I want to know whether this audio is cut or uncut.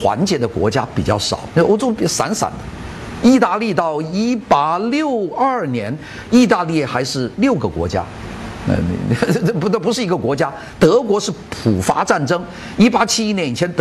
uncut